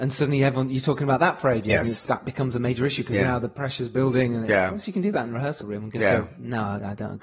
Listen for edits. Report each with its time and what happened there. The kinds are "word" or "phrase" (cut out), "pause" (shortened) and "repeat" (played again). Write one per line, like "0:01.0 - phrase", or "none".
none